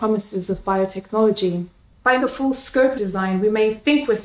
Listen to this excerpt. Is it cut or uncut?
cut